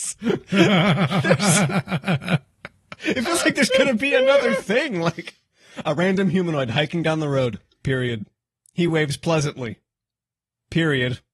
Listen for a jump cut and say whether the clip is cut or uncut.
uncut